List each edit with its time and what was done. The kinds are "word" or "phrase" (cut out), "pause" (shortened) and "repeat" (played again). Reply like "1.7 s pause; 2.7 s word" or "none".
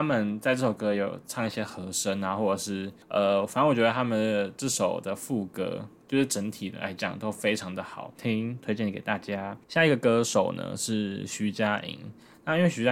3.0 s pause; 9.6 s pause